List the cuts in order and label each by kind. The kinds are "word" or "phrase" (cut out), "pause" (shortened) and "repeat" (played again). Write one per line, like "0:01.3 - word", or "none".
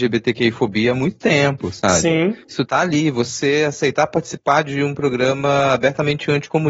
none